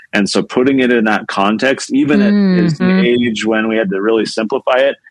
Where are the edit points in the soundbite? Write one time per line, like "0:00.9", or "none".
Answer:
0:02.8